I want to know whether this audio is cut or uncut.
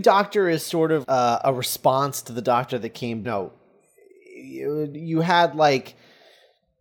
cut